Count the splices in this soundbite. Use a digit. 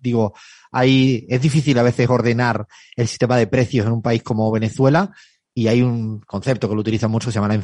0